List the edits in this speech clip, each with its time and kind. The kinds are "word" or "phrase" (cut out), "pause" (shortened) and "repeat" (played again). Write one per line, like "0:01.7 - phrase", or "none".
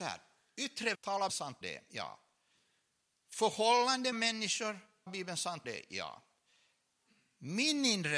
0:00.9 - word
0:01.3 - word
0:01.6 - word
0:04.1 - word
0:05.1 - word
0:05.6 - word